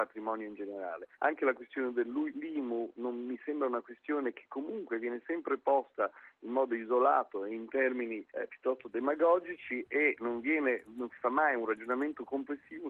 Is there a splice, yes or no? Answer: yes